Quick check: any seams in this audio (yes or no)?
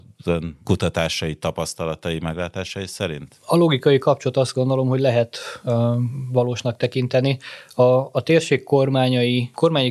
no